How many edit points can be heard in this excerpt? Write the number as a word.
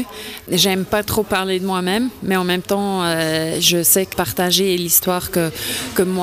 one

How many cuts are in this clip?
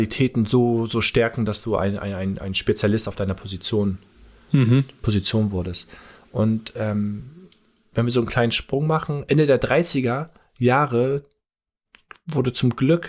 zero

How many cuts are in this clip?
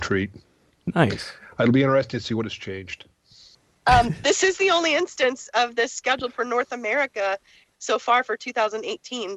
zero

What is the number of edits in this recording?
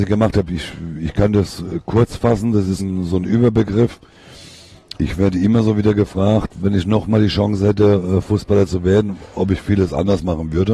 one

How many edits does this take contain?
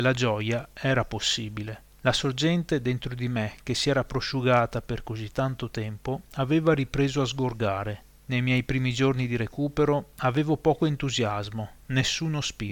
three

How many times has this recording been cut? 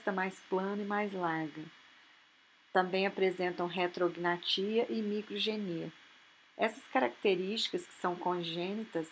zero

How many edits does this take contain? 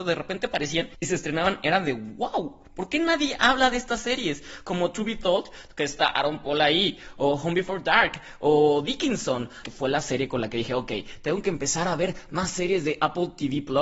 one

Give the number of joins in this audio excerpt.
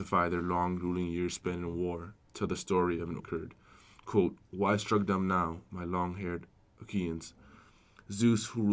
one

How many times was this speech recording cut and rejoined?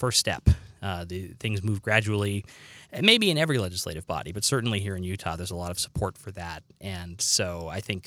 zero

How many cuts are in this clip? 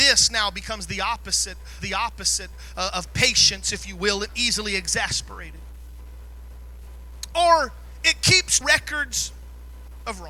three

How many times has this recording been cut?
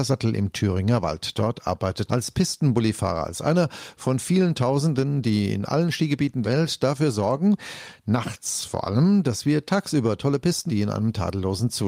three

